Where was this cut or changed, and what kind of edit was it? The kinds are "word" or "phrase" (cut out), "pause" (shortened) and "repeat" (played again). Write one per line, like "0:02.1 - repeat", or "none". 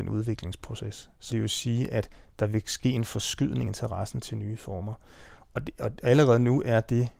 0:01.3 - word
0:03.7 - phrase